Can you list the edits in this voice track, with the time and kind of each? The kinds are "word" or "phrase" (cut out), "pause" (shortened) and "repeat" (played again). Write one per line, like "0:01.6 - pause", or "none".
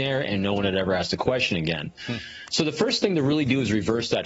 none